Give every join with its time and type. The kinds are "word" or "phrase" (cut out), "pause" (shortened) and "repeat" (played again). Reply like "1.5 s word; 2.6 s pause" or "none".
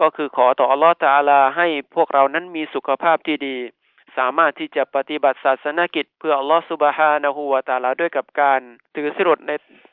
6.1 s pause; 8.8 s pause